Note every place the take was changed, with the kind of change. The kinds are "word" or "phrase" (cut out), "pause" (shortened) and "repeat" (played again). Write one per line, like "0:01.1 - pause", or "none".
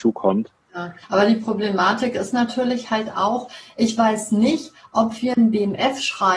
0:01.0 - pause